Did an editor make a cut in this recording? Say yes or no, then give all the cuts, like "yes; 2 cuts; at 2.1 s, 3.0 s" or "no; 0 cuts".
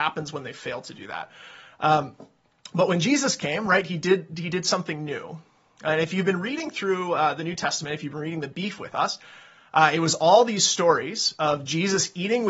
no; 0 cuts